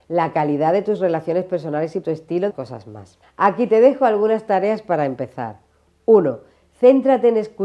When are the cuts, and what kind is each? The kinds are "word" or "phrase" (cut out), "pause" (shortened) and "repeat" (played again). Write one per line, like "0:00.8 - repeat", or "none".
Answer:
0:02.0 - word
0:02.5 - phrase
0:03.2 - pause